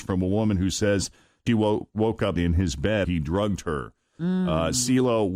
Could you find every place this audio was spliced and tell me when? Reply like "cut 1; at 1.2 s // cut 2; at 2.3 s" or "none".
cut 1; at 1.5 s // cut 2; at 2.4 s // cut 3; at 3.0 s